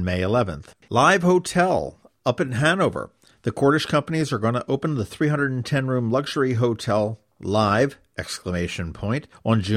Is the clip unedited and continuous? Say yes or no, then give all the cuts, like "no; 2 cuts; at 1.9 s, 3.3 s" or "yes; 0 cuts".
yes; 0 cuts